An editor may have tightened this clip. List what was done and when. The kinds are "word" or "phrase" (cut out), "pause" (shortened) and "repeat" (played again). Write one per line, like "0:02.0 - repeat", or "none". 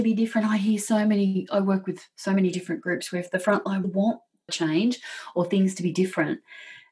0:03.8 - word
0:04.5 - word